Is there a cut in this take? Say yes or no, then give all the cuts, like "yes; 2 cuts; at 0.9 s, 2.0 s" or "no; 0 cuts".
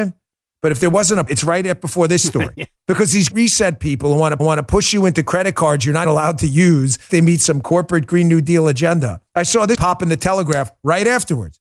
yes; 8 cuts; at 1.3 s, 2.7 s, 3.3 s, 4.4 s, 6.0 s, 7.1 s, 9.3 s, 9.7 s